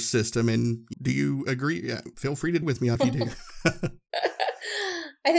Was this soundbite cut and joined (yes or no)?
yes